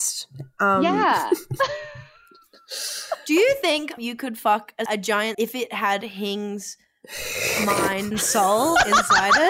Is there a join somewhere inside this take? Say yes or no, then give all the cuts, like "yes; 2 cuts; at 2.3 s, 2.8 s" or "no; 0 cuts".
yes; 4 cuts; at 4.0 s, 4.9 s, 5.3 s, 8.1 s